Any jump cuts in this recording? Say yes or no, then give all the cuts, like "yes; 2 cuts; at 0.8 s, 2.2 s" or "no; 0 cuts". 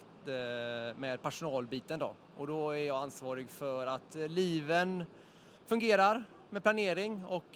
yes; 1 cut; at 5.6 s